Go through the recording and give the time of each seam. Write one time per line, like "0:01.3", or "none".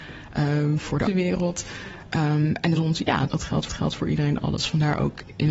0:01.1
0:02.8
0:03.3
0:03.7